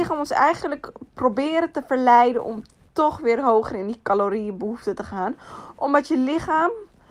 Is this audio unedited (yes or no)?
yes